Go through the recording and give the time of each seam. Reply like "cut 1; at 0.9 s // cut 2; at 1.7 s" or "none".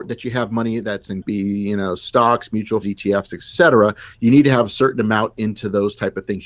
cut 1; at 1.2 s // cut 2; at 2.8 s